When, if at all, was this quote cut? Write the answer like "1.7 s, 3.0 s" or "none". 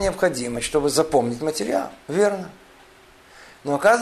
2.0 s